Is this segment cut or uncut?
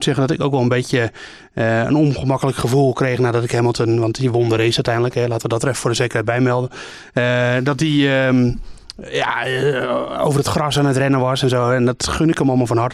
uncut